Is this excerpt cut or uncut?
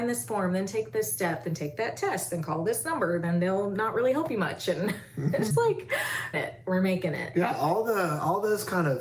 cut